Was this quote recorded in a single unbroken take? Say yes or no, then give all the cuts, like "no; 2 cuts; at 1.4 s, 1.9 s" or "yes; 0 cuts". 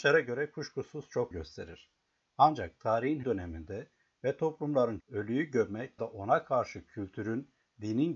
no; 4 cuts; at 1.3 s, 3.2 s, 5.0 s, 6.0 s